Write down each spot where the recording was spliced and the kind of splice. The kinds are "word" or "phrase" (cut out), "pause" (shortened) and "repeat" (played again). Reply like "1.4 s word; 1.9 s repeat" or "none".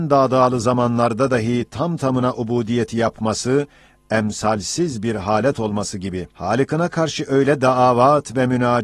6.3 s pause